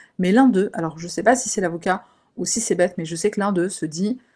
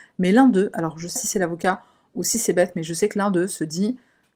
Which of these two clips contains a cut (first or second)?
second